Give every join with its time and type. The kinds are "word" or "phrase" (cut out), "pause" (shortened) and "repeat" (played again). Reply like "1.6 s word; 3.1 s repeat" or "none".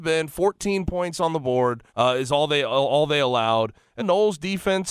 1.9 s pause; 4.0 s phrase